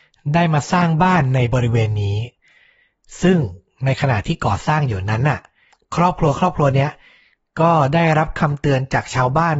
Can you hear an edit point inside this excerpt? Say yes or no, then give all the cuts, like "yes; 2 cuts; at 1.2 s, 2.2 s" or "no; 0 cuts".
no; 0 cuts